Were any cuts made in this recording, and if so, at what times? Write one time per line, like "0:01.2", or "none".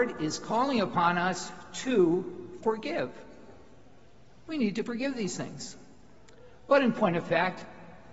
none